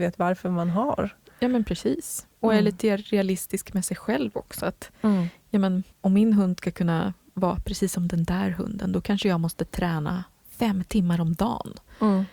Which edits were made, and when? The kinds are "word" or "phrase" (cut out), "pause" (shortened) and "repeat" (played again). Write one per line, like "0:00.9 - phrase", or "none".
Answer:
0:05.9 - pause